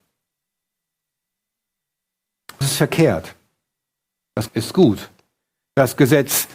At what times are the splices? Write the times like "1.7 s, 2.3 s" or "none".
2.6 s, 4.5 s